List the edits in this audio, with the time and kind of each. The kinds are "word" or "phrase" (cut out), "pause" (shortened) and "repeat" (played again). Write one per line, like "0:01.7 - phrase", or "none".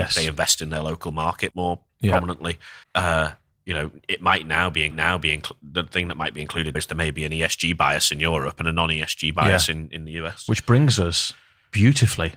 0:01.5 - word
0:02.8 - pause
0:04.9 - repeat
0:06.7 - word